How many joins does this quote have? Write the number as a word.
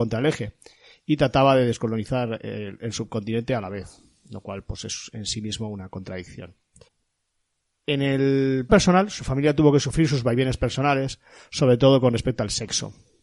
two